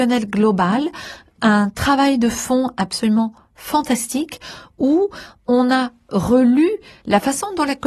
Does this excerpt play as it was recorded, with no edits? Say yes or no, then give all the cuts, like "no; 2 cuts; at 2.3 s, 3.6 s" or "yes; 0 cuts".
yes; 0 cuts